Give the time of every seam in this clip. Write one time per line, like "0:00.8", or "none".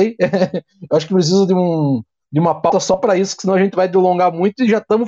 none